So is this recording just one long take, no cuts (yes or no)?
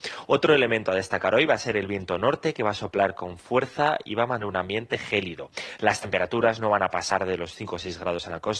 yes